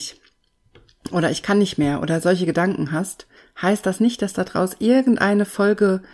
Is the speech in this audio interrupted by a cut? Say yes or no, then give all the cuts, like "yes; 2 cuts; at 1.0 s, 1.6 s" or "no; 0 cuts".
yes; 1 cut; at 3.4 s